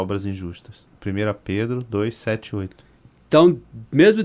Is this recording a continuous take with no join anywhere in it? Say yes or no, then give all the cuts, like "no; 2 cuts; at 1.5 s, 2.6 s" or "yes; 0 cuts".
yes; 0 cuts